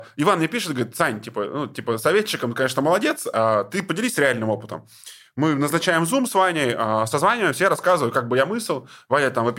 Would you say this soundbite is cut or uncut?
uncut